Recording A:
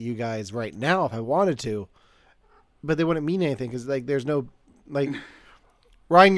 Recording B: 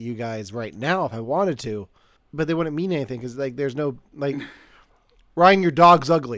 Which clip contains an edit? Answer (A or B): B